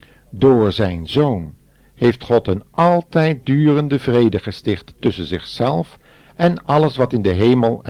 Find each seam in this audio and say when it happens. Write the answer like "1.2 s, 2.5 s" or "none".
none